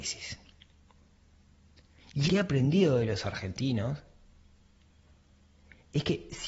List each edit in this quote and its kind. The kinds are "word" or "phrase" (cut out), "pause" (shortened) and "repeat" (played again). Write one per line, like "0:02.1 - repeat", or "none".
0:02.3 - word